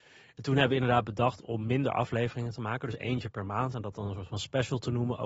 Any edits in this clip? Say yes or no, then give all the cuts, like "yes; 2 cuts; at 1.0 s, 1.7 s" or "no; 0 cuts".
no; 0 cuts